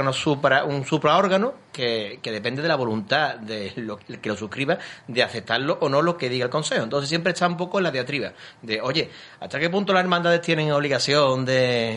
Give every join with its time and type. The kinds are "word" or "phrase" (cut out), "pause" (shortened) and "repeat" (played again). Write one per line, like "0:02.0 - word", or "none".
0:04.0 - word